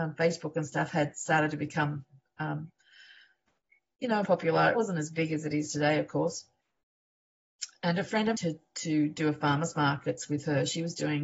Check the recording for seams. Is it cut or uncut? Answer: cut